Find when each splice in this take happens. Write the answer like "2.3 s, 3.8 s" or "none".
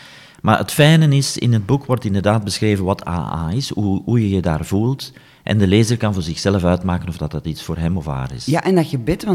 none